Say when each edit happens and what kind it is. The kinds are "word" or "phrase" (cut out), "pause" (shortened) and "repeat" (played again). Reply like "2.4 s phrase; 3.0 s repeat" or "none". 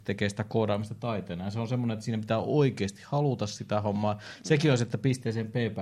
none